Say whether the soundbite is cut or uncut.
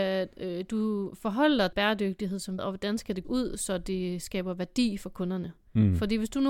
cut